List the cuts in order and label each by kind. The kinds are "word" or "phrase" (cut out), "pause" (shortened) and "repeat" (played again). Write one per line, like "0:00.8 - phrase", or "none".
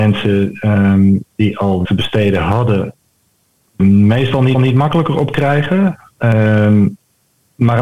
0:01.8 - word
0:03.8 - word
0:04.5 - repeat